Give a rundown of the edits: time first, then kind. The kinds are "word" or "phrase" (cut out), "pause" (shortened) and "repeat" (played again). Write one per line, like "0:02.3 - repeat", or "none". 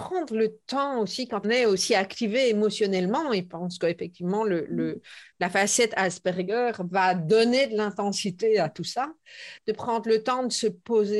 0:01.4 - word

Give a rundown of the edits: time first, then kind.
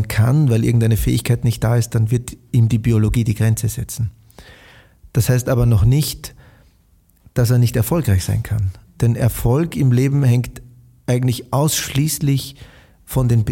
none

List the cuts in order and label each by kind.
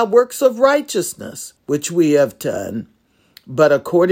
0:01.6 - pause

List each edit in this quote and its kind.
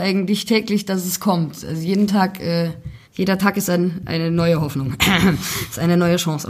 0:03.0 - pause

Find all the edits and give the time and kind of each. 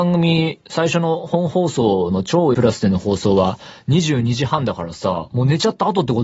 0:02.5 - word

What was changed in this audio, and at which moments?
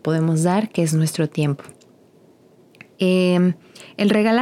none

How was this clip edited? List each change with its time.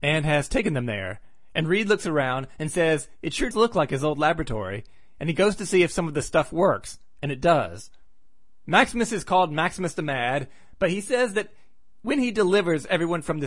0:03.5 - word

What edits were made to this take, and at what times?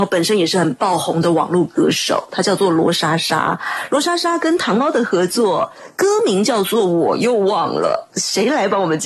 0:08.1 - pause

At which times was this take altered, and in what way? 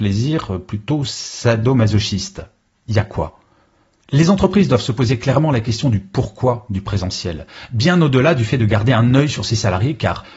none

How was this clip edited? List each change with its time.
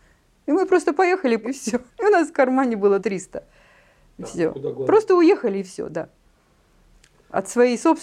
0:01.4 - word
0:01.9 - pause
0:03.0 - word

